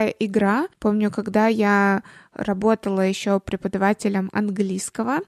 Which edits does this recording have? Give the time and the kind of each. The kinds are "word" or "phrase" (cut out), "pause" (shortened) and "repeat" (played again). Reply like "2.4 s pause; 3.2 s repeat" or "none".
none